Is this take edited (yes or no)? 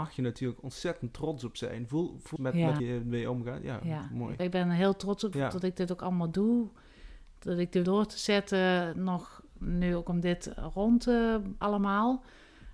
yes